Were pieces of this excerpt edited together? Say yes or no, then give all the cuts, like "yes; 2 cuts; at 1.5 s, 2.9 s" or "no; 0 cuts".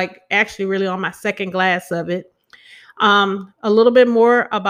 no; 0 cuts